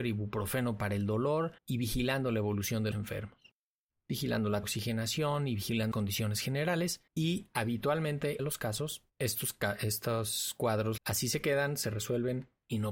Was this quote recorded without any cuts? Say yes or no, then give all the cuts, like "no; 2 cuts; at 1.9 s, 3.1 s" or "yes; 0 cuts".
no; 8 cuts; at 1.6 s, 2.9 s, 4.6 s, 5.9 s, 7.1 s, 8.4 s, 9.1 s, 11.0 s